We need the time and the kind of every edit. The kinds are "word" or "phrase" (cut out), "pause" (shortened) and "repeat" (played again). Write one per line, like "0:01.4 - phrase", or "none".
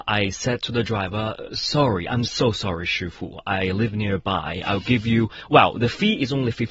none